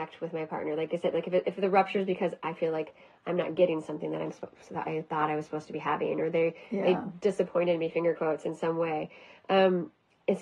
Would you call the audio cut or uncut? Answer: uncut